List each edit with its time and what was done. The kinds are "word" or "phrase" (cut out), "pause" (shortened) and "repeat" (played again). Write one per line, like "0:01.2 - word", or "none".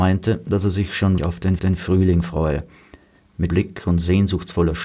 0:01.2 - word
0:01.6 - repeat
0:03.5 - word